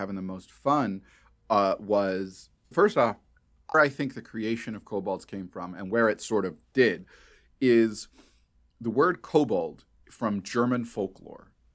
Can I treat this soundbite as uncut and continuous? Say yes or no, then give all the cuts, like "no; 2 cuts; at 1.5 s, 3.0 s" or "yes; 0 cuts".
no; 4 cuts; at 2.7 s, 3.7 s, 6.7 s, 10.0 s